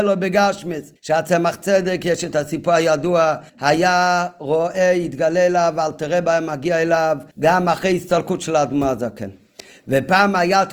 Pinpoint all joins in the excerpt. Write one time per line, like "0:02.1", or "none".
0:01.0
0:03.5
0:07.3